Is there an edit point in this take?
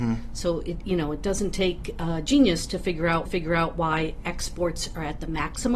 yes; 1 cut; at 3.3 s

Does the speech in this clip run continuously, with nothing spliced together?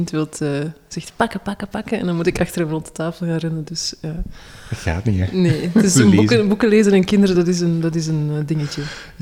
yes; 0 cuts

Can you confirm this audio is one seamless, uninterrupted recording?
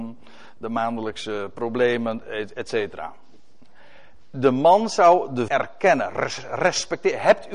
no; 1 cut; at 5.5 s

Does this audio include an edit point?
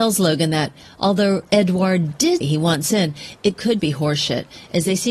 yes; 2 cuts; at 2.4 s, 3.8 s

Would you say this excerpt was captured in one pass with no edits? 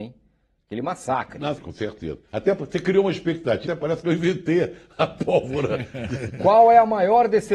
no; 2 cuts; at 1.6 s, 3.7 s

